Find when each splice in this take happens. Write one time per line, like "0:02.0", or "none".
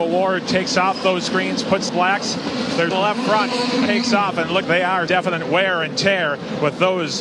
0:01.9
0:02.9
0:03.9
0:04.6
0:05.1